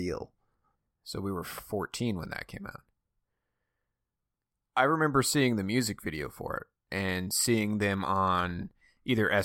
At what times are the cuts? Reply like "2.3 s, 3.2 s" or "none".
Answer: none